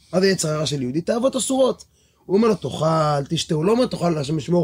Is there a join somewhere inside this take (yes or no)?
no